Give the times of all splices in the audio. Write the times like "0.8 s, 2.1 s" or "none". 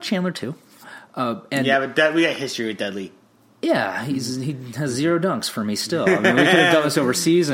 none

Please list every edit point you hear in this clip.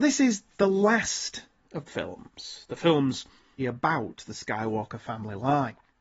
1.9 s, 3.6 s

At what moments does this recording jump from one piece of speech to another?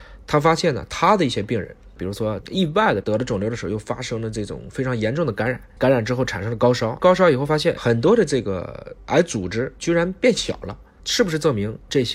7.7 s

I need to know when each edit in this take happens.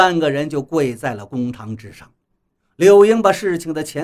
2.5 s

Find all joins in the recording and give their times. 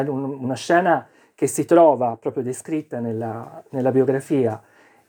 none

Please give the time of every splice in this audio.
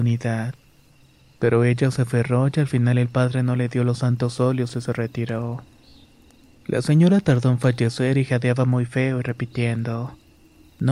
none

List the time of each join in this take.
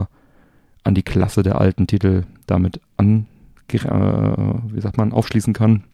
none

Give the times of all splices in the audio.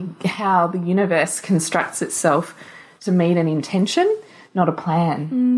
none

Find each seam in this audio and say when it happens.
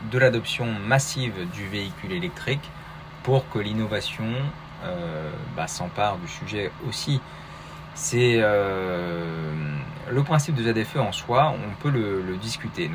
none

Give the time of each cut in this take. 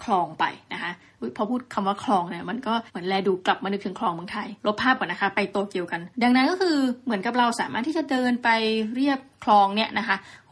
2.9 s, 4.6 s, 6.1 s

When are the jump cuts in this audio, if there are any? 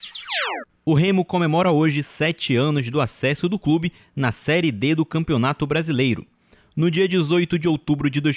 none

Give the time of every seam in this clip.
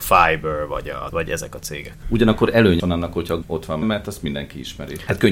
1.1 s, 2.8 s, 3.4 s, 3.8 s

